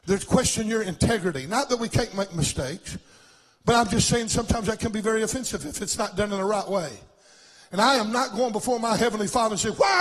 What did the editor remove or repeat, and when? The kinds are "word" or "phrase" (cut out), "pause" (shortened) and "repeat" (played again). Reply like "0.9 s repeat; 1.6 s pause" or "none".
none